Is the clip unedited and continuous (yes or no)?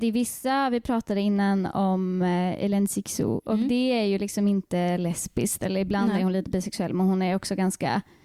yes